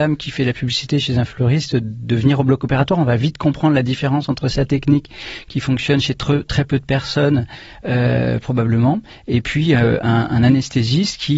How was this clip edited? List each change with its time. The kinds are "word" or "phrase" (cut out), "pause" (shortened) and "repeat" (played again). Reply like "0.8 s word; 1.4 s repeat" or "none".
none